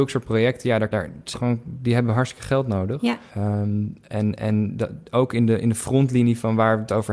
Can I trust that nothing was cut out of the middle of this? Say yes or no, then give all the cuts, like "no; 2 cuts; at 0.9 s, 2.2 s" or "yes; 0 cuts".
no; 3 cuts; at 0.9 s, 1.3 s, 3.3 s